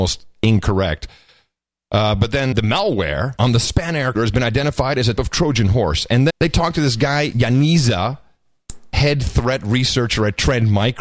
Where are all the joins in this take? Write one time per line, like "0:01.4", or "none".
0:02.5
0:03.4
0:04.1
0:05.2
0:06.3
0:07.3